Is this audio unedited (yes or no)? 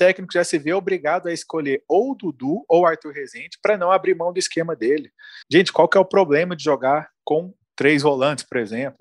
no